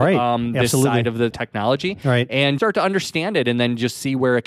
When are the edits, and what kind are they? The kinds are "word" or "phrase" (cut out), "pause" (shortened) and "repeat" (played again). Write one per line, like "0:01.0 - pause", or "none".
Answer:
0:01.3 - word
0:02.6 - word

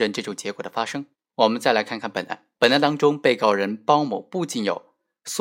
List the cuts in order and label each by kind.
0:01.1 - pause
0:02.5 - pause

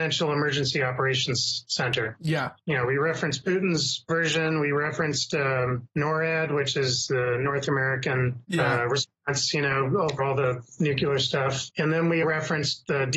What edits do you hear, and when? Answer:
0:10.2 - word
0:12.2 - word

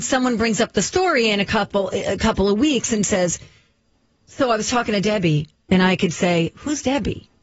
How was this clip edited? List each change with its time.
none

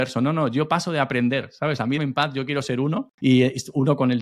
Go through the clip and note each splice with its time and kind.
0:02.0 - word
0:03.1 - pause

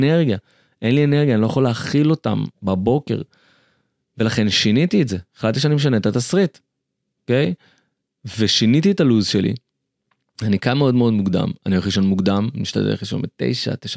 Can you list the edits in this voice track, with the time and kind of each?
none

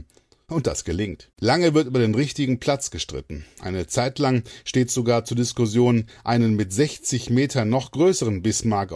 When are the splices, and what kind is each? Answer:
0:01.3 - pause

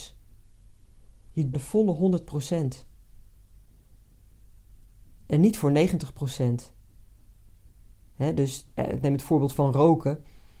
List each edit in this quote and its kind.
0:01.5 - phrase
0:08.7 - pause

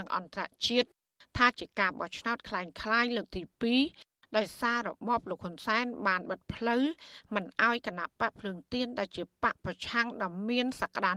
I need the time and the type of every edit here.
none

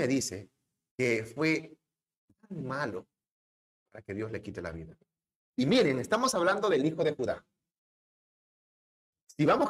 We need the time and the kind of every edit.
none

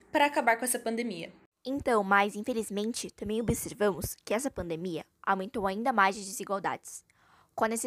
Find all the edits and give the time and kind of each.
0:01.5 - pause

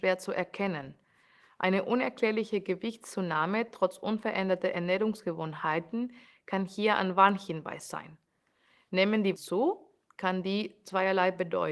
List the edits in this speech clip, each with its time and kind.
0:09.4 - word

